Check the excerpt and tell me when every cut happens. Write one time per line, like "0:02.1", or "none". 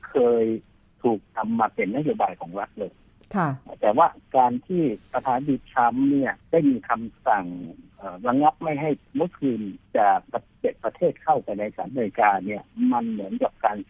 0:06.4
0:09.9